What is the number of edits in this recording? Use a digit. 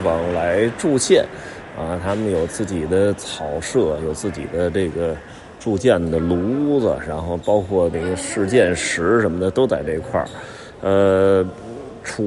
0